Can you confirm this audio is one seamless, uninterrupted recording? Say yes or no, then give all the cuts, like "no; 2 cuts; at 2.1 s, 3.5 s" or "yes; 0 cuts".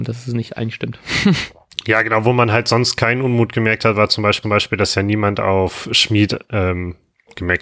no; 1 cut; at 4.4 s